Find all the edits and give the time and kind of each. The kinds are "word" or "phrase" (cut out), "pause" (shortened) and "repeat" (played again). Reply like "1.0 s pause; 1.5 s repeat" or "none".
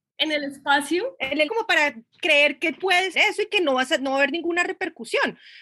1.5 s word; 3.1 s word